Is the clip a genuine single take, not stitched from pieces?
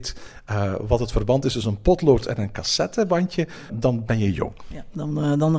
no; 1 cut; at 3.7 s

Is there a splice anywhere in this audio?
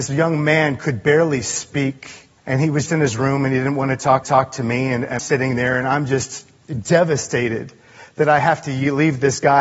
yes; 5 cuts; at 2.4 s, 2.9 s, 4.2 s, 5.2 s, 6.6 s

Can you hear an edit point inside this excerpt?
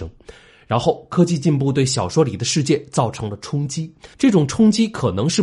yes; 1 cut; at 4.1 s

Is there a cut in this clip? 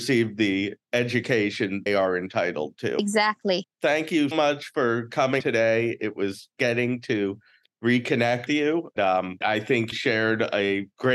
yes; 8 cuts; at 1.9 s, 4.3 s, 5.4 s, 6.6 s, 8.5 s, 9.0 s, 9.4 s, 9.9 s

